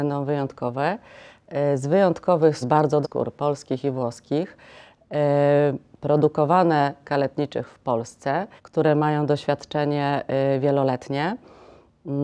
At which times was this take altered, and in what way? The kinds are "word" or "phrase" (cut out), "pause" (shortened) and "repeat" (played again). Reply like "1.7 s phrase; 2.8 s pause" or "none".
2.6 s word; 3.0 s word; 7.0 s phrase; 8.6 s pause